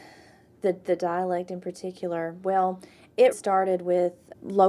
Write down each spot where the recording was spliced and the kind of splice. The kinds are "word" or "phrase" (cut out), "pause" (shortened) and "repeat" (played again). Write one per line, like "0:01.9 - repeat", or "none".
0:03.3 - word